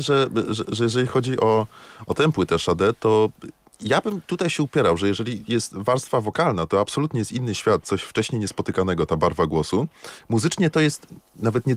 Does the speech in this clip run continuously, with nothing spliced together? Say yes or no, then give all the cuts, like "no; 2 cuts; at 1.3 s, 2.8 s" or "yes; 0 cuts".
yes; 0 cuts